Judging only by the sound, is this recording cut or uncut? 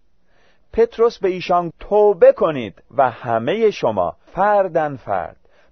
cut